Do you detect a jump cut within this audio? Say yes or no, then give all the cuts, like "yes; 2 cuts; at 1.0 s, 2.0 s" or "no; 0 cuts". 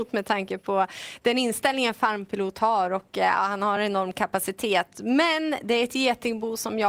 no; 0 cuts